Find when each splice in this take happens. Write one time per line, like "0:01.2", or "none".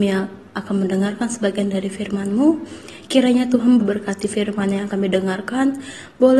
0:03.8
0:04.9